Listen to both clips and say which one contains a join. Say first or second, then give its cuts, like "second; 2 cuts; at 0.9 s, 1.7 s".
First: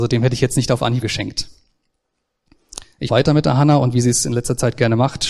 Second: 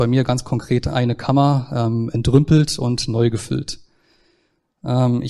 first; 2 cuts; at 1.0 s, 3.1 s